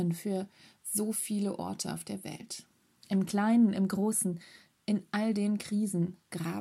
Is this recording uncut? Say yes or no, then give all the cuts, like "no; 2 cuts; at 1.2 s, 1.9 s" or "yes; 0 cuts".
yes; 0 cuts